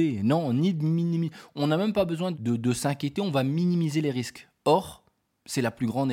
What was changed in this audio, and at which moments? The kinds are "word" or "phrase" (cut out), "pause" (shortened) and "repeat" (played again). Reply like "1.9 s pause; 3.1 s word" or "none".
2.3 s word